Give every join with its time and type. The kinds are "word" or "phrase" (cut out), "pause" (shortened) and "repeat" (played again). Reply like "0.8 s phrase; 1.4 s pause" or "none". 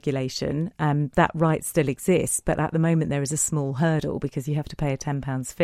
none